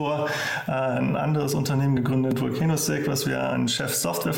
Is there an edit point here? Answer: no; 0 cuts

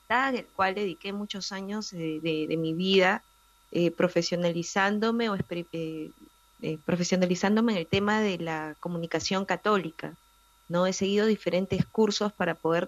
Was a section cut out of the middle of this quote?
no; 0 cuts

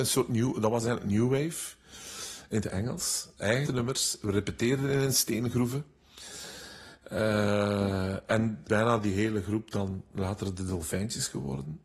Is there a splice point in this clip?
yes; 2 cuts; at 3.7 s, 8.7 s

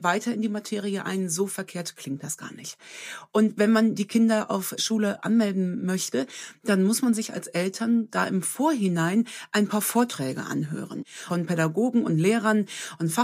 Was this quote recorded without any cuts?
no; 1 cut; at 4.8 s

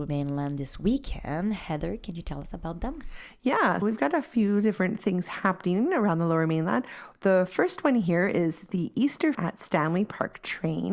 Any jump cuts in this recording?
yes; 2 cuts; at 3.8 s, 9.3 s

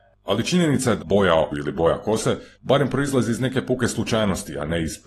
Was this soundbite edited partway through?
yes; 3 cuts; at 1.0 s, 1.5 s, 2.5 s

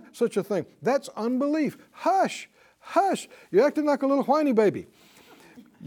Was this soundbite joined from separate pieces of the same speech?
no; 0 cuts

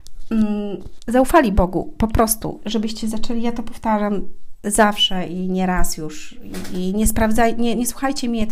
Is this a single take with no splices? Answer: yes; 0 cuts

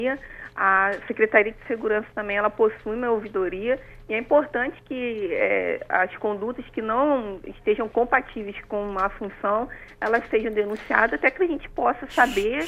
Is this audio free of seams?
yes; 0 cuts

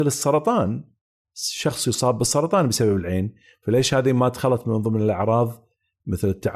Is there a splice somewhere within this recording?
no; 0 cuts

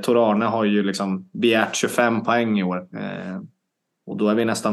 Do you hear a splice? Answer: no; 0 cuts

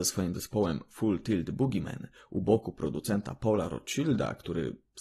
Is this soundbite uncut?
yes; 0 cuts

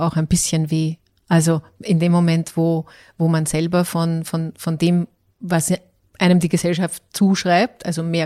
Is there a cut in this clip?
no; 0 cuts

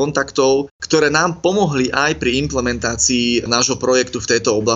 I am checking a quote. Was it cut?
no; 0 cuts

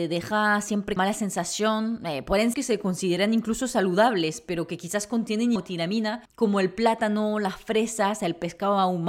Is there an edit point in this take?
yes; 4 cuts; at 1.0 s, 2.5 s, 5.6 s, 6.3 s

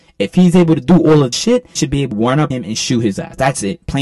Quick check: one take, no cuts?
no; 4 cuts; at 1.3 s, 1.8 s, 2.1 s, 2.5 s

